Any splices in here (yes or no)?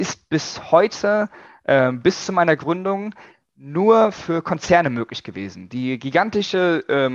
no